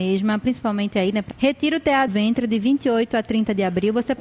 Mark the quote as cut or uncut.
cut